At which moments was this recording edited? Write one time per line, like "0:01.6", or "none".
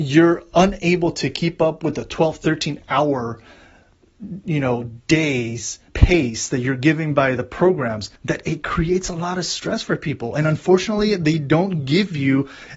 0:05.9
0:08.2